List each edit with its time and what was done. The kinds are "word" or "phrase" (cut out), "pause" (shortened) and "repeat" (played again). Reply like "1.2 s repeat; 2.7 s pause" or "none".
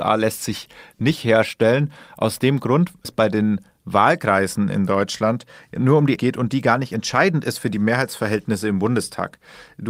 3.0 s word; 6.2 s word